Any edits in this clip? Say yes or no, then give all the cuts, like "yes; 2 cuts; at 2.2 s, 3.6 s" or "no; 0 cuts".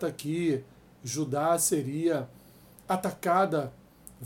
no; 0 cuts